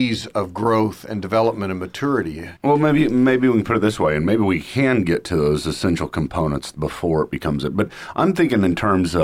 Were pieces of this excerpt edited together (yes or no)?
yes